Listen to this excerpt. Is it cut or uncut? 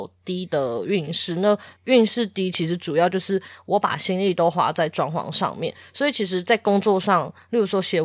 cut